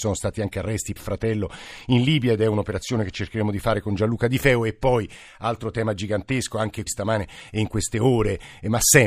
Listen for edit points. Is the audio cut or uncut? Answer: cut